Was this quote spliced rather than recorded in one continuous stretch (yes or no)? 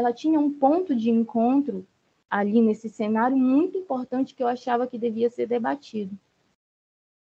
no